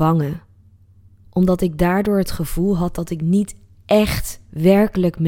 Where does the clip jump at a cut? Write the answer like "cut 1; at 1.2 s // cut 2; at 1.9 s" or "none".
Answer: none